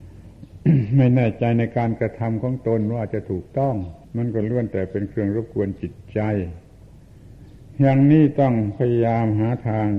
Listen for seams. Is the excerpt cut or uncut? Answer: cut